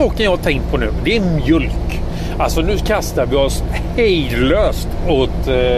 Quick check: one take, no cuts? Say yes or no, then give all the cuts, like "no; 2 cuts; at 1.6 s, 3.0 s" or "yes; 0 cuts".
yes; 0 cuts